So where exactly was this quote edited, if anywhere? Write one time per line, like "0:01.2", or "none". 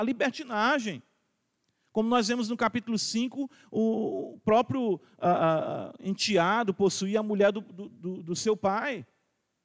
none

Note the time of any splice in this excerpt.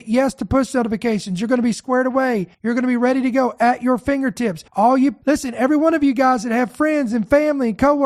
0:02.5
0:04.7
0:05.2

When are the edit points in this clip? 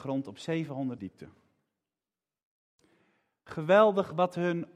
0:01.0

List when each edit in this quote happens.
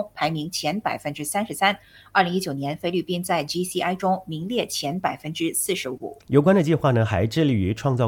none

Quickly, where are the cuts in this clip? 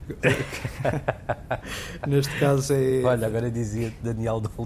none

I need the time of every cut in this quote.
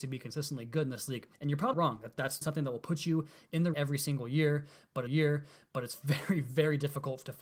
0:01.3
0:01.7
0:02.4
0:03.7
0:05.1

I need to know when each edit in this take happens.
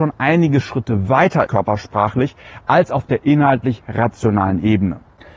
0:01.5

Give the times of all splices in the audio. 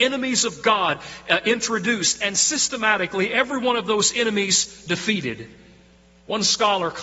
none

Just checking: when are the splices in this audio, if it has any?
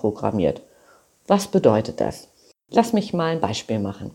none

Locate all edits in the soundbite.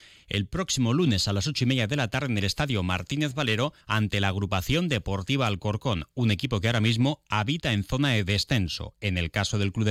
0:03.8

